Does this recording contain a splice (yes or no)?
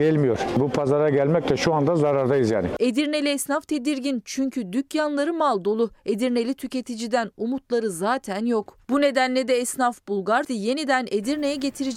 yes